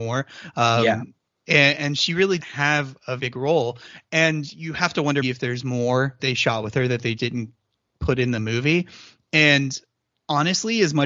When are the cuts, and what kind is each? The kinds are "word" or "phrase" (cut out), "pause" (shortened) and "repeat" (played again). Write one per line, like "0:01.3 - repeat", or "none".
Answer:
0:01.7 - word
0:02.4 - word
0:03.2 - word
0:05.2 - word
0:06.2 - word
0:07.2 - word